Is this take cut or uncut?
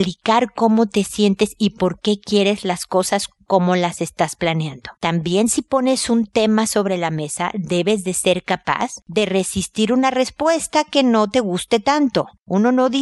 cut